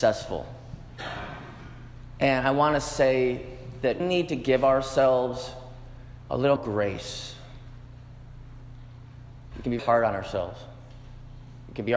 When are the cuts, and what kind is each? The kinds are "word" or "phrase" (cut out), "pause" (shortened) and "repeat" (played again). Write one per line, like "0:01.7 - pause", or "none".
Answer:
0:04.0 - word
0:06.6 - word
0:09.8 - word